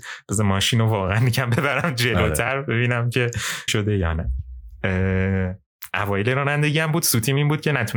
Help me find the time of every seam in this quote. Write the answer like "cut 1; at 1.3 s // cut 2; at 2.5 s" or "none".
cut 1; at 3.7 s